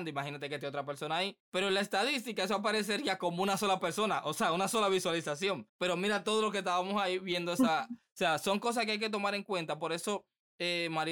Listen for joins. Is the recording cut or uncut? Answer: cut